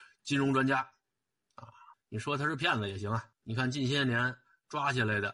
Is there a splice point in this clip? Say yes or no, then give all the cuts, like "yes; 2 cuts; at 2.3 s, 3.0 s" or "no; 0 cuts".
yes; 2 cuts; at 1.9 s, 3.3 s